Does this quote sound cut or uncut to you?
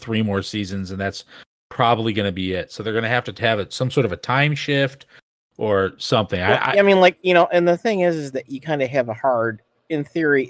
uncut